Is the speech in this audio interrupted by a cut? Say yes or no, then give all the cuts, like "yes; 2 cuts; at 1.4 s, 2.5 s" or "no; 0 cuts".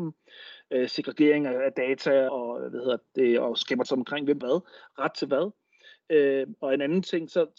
yes; 3 cuts; at 2.3 s, 3.8 s, 4.4 s